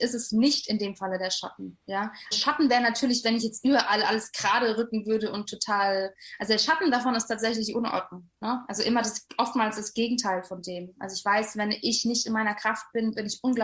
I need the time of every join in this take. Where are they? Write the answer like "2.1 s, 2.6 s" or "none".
2.3 s